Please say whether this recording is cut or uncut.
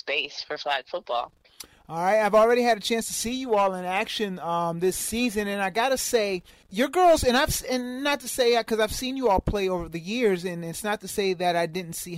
cut